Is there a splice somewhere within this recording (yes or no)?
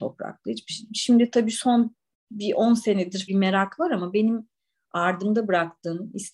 yes